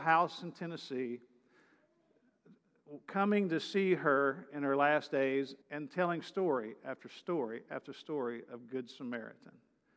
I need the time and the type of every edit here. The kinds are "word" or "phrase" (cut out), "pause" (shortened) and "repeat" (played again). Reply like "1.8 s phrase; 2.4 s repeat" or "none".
5.6 s pause